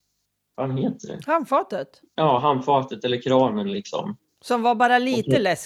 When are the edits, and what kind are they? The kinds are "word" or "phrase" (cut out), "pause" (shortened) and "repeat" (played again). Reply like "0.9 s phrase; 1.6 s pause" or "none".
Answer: 2.1 s pause